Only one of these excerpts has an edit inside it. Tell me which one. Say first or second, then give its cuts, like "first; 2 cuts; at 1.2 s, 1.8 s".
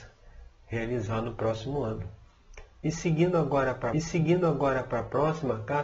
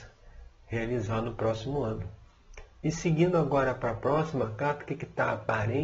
first; 1 cut; at 3.9 s